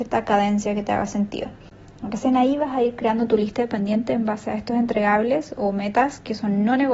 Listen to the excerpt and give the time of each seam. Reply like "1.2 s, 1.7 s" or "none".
none